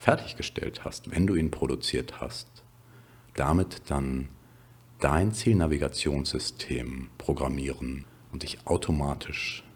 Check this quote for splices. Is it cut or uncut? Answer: cut